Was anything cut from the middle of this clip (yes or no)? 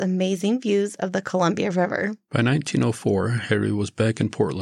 no